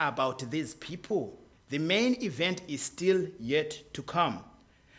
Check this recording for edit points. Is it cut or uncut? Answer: cut